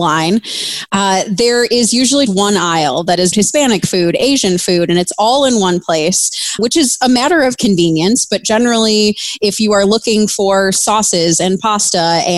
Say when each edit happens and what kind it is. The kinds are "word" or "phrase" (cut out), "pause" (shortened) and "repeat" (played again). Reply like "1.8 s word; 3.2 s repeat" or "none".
2.3 s word; 3.3 s phrase; 6.6 s word